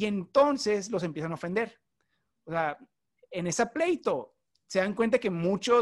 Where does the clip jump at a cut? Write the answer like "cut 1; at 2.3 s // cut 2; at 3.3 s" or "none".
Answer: none